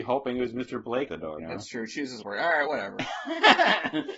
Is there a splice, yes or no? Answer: yes